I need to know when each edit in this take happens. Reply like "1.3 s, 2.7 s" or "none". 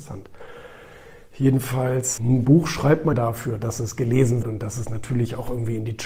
2.2 s, 3.1 s, 4.4 s

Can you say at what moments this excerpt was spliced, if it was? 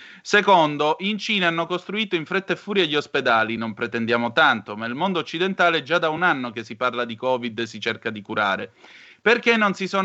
none

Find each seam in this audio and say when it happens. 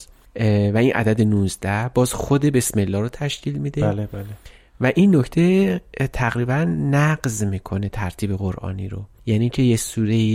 none

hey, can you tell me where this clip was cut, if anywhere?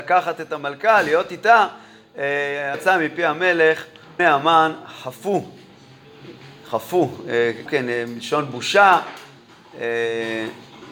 2.7 s, 4.2 s, 7.7 s

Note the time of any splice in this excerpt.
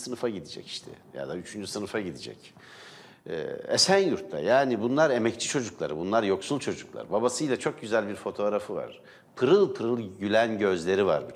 none

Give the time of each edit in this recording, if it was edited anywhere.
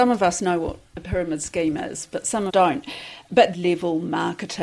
2.5 s, 3.5 s

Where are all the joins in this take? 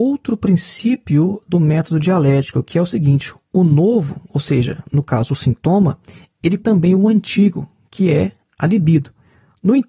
6.6 s

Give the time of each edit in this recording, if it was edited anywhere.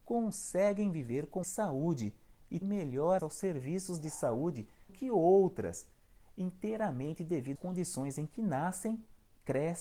1.4 s, 2.6 s, 3.2 s, 4.9 s, 7.6 s

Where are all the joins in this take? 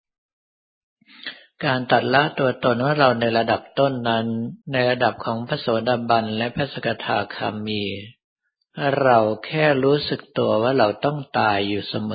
4.6 s

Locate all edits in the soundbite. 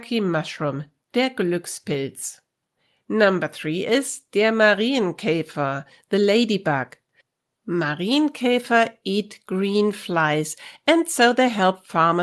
none

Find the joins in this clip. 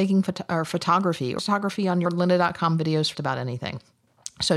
1.4 s, 2.1 s, 3.1 s

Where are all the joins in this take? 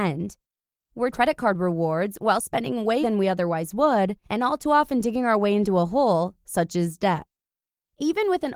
1.1 s, 3.0 s, 4.2 s

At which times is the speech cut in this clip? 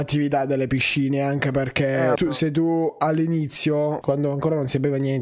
2.2 s, 4.0 s

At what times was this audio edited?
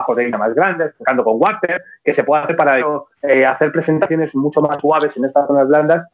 2.8 s, 3.2 s

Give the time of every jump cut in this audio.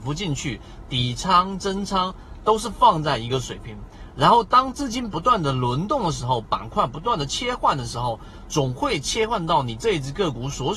1.6 s

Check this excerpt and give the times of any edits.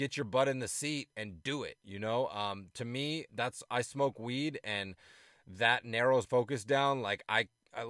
3.3 s, 6.2 s

